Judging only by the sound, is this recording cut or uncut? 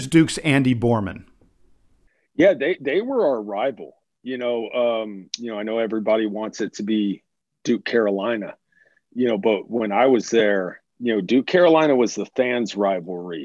cut